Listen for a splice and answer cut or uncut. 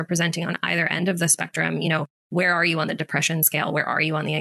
uncut